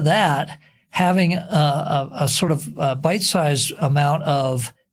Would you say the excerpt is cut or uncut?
uncut